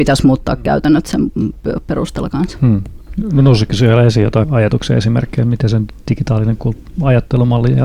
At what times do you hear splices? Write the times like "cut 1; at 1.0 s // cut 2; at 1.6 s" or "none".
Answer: cut 1; at 4.4 s